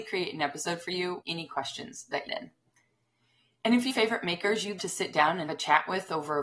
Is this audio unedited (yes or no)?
no